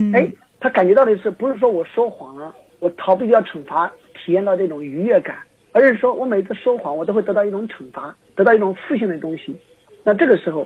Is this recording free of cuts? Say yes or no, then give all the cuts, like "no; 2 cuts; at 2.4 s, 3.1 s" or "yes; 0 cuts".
yes; 0 cuts